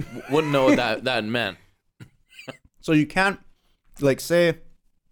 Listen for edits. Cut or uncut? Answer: uncut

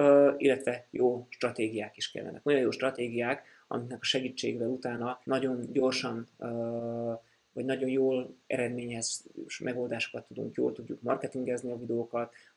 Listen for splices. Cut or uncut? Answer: cut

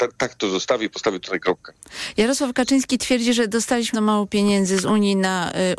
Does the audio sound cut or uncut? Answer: cut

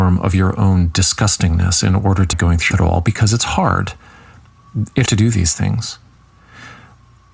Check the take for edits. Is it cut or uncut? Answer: cut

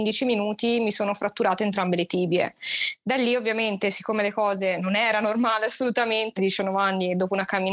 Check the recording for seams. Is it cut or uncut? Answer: cut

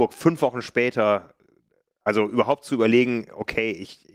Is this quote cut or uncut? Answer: uncut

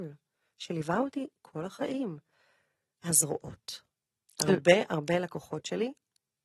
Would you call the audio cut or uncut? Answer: cut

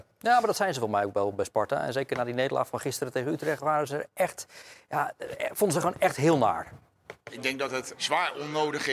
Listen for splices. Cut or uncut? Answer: cut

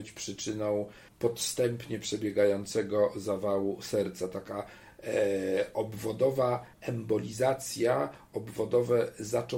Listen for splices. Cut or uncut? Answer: cut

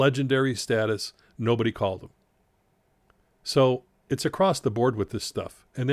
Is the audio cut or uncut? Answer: uncut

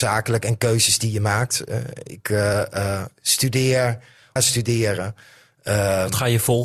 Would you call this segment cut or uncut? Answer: cut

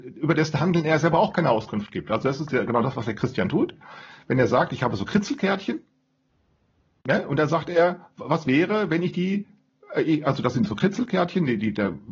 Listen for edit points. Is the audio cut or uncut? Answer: uncut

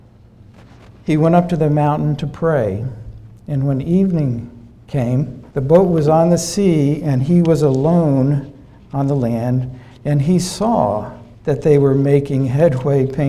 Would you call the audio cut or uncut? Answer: cut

